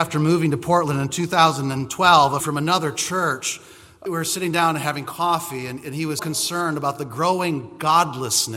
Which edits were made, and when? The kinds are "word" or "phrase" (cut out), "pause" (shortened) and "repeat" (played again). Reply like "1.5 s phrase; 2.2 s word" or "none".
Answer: 2.4 s word; 4.1 s word; 6.2 s word

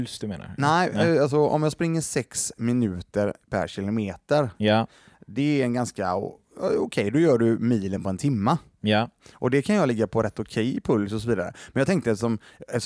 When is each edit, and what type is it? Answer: 3.4 s pause

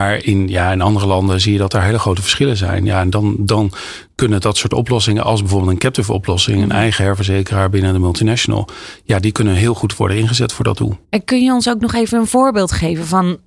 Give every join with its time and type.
11.0 s pause

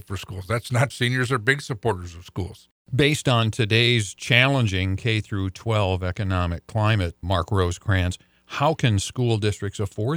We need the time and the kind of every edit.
0.9 s word; 7.2 s word

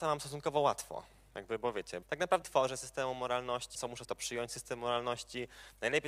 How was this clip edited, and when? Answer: 2.0 s word; 2.4 s word; 3.7 s word; 4.0 s word

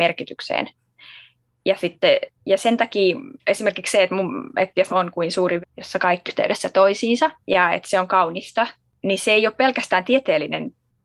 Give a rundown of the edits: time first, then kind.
2.4 s pause; 3.4 s pause; 4.9 s phrase; 5.6 s word; 6.3 s word; 7.4 s pause

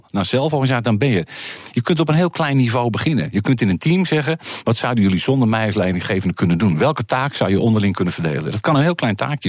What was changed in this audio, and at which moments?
none

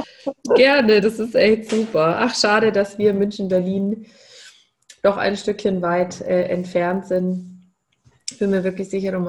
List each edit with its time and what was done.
none

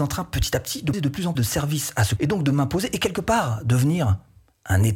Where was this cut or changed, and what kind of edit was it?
0.9 s word; 1.4 s word; 2.2 s word

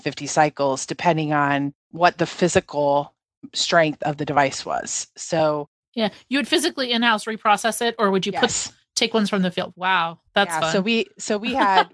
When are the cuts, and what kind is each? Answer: 10.3 s pause

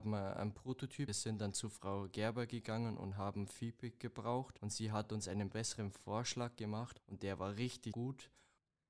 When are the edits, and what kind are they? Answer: 1.1 s phrase

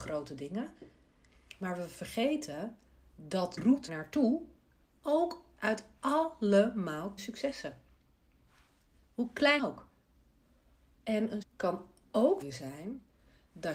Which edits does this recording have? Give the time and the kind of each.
3.6 s word; 3.9 s word; 5.6 s word; 7.2 s word; 9.6 s word; 11.4 s word; 12.4 s word

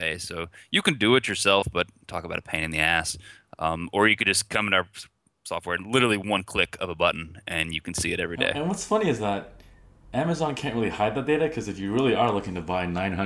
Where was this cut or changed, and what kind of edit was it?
none

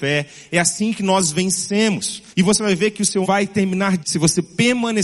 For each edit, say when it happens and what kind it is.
2.3 s pause; 3.2 s word; 4.0 s word

